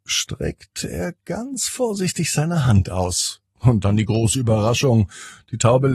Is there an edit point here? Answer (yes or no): yes